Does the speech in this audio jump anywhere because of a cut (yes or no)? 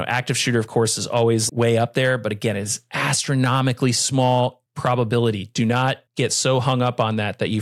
yes